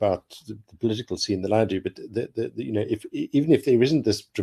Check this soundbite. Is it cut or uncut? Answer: uncut